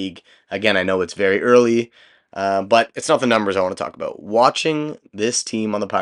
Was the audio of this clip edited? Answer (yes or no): no